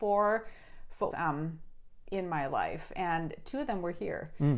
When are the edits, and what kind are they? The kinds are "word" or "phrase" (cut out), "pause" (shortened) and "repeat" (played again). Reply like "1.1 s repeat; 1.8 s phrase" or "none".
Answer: 1.1 s word